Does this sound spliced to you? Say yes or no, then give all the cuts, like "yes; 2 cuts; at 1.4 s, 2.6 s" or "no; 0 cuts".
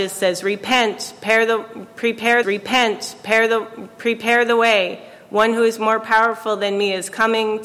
yes; 1 cut; at 2.4 s